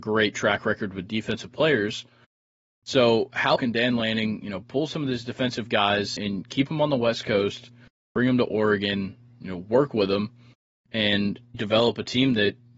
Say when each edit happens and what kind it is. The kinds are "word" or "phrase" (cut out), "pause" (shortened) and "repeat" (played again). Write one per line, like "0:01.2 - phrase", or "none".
0:03.6 - word
0:06.2 - word
0:11.5 - word